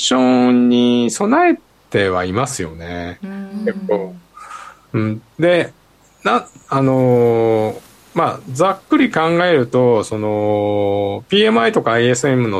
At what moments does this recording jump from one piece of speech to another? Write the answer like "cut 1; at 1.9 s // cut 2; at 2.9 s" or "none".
none